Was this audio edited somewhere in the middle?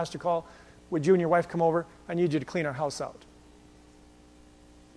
no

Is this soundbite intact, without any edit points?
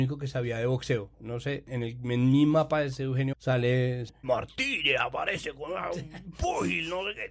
no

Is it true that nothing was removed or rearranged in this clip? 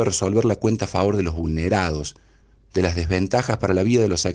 yes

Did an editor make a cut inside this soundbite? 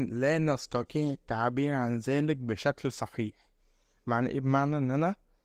no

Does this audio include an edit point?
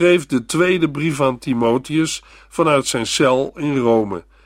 no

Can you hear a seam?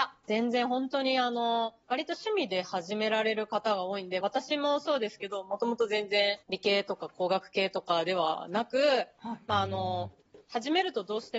yes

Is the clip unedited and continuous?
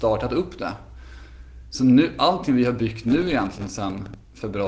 yes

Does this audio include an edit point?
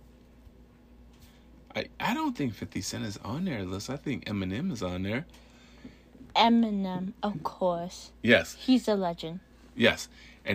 no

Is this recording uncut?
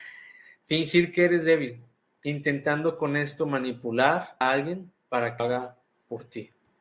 no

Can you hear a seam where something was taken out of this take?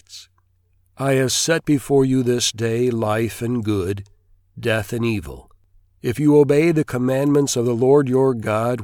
no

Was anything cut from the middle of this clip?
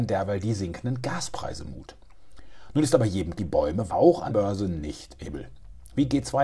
yes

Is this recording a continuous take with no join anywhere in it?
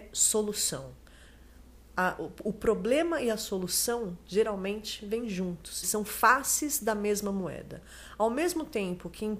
no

